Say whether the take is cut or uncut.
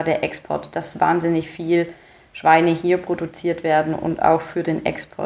uncut